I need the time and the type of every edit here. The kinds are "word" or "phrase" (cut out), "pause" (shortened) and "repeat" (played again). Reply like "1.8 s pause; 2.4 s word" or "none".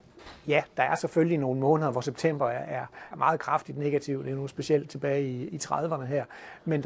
3.1 s word